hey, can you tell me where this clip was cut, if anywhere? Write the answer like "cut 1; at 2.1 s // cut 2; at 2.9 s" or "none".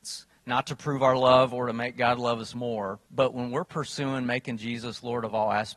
cut 1; at 3.0 s